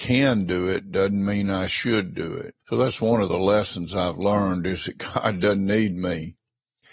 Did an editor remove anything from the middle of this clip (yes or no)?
yes